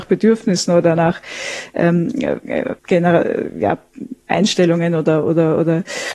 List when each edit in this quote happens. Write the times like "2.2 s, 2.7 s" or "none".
2.4 s, 2.8 s, 4.2 s